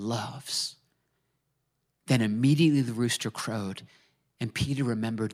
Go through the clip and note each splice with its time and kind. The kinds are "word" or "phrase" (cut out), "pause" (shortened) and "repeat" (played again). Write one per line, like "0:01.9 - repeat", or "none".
none